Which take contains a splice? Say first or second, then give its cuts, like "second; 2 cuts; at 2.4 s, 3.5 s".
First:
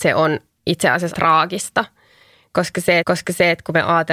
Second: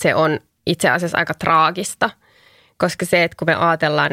first; 2 cuts; at 1.1 s, 3.0 s